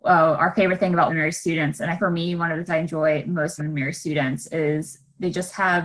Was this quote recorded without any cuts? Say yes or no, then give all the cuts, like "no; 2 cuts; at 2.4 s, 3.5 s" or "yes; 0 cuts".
no; 4 cuts; at 1.1 s, 2.0 s, 2.7 s, 3.6 s